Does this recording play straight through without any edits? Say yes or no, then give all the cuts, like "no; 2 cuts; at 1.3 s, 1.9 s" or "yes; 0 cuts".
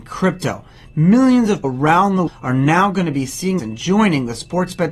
no; 3 cuts; at 1.6 s, 2.3 s, 3.6 s